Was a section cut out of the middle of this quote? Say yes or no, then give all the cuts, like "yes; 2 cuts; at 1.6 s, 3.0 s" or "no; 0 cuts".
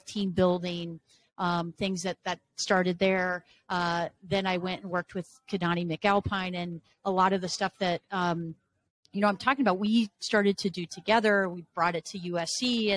no; 0 cuts